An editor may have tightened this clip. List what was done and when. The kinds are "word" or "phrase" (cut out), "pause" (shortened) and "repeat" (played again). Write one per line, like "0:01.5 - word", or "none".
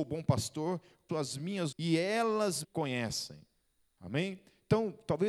0:01.1 - word
0:01.7 - word
0:02.6 - word